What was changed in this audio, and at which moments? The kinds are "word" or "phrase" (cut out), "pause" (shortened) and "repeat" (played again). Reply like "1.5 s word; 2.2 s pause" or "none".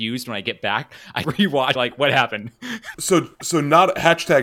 1.2 s word; 1.8 s phrase; 2.9 s word; 3.3 s pause